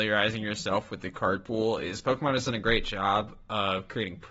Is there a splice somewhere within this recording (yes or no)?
no